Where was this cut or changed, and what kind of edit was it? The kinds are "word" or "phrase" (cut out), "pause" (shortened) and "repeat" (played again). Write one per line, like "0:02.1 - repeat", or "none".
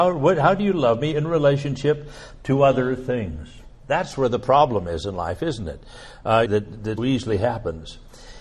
0:06.5 - word
0:07.0 - word